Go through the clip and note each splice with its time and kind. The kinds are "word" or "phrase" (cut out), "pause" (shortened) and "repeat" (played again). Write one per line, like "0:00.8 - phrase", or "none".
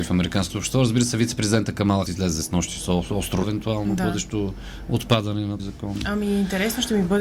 0:02.1 - word
0:03.4 - word
0:05.6 - word

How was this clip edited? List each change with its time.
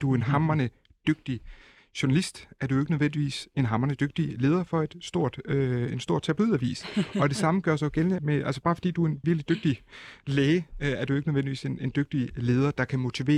0:08.2 - word
0:09.2 - word

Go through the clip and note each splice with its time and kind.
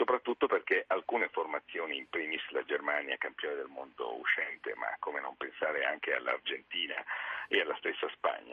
none

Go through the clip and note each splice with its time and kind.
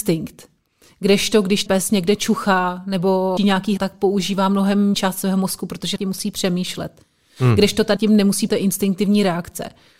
0:01.7 - word
0:03.4 - word
0:03.8 - word
0:04.9 - word
0:06.0 - word
0:08.0 - word
0:08.5 - word

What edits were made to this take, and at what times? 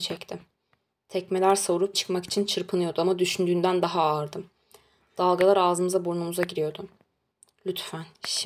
0:01.9 - word

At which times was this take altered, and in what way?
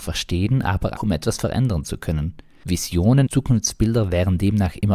0:01.0 - word
0:03.3 - word

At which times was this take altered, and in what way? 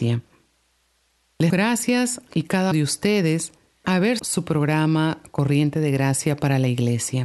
0:01.5 - word
0:02.3 - phrase
0:02.7 - word
0:03.8 - word
0:04.2 - word

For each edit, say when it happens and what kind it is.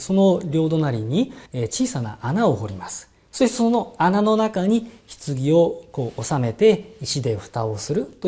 0:01.5 - pause

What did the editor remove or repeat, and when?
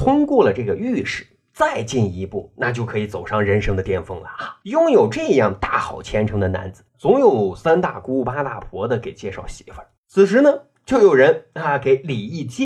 0:04.6 - pause
0:06.9 - pause
0:10.0 - pause

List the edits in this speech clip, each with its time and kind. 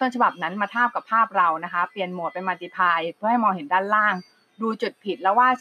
none

